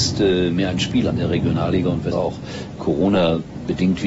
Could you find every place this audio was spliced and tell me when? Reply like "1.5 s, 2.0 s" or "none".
1.1 s, 2.1 s